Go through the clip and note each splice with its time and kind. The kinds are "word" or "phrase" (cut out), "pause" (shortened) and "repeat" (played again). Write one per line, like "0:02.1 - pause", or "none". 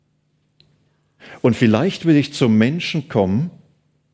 none